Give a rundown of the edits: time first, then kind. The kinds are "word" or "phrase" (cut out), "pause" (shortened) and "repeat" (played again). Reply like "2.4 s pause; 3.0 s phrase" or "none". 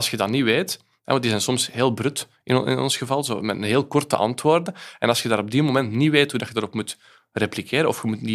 none

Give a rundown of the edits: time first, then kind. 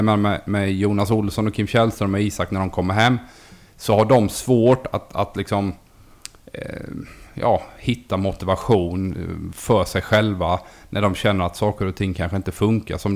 none

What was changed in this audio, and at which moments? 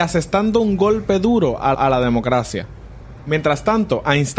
1.7 s repeat

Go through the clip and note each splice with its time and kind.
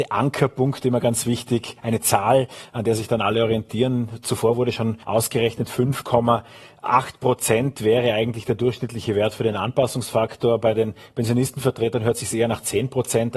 5.0 s pause

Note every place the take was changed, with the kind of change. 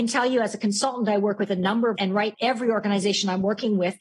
2.0 s word; 2.3 s word

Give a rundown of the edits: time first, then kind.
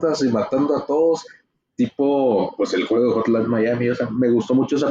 none

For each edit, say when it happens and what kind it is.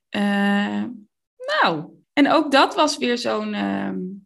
2.0 s pause

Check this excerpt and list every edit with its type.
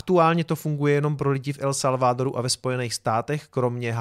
none

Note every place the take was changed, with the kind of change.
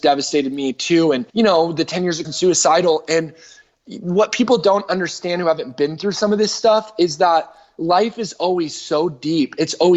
1.3 s pause; 2.2 s phrase

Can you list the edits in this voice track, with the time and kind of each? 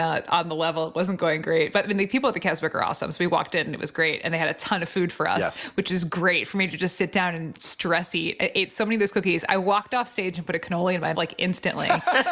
11.1 s word

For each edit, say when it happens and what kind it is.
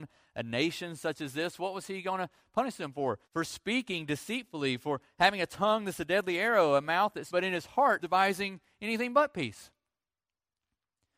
3.2 s pause; 7.3 s phrase; 8.0 s word

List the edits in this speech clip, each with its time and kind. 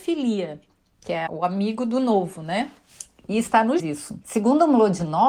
1.3 s word; 3.8 s word; 4.2 s pause

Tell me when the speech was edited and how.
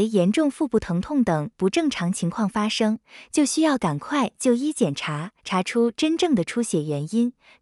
5.4 s pause

